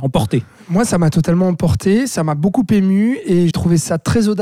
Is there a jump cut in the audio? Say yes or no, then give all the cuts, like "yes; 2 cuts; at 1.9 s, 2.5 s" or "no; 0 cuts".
yes; 1 cut; at 3.5 s